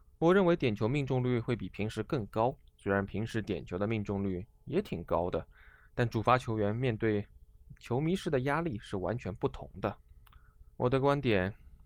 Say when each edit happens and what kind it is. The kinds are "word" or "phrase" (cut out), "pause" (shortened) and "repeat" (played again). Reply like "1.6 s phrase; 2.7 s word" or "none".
2.7 s pause; 10.7 s pause